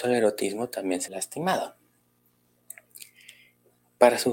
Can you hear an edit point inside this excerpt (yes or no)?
yes